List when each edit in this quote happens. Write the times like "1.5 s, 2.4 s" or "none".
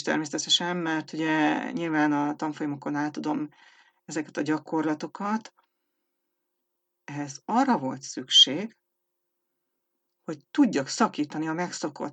none